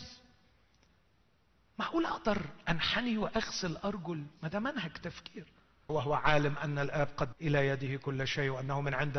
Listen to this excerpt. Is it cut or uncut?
cut